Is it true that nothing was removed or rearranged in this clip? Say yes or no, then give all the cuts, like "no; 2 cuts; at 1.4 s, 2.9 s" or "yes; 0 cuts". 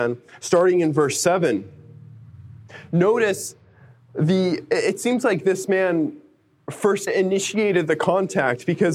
no; 1 cut; at 7.1 s